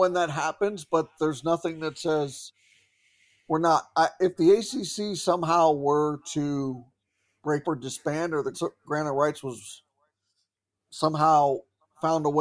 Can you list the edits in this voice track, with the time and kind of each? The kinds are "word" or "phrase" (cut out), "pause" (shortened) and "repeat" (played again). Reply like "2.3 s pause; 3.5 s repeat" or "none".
7.6 s word; 8.5 s word